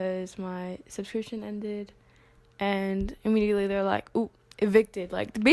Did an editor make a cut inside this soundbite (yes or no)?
no